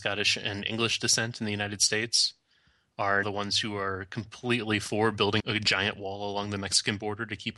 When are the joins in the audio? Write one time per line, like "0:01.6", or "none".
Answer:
0:03.2
0:05.4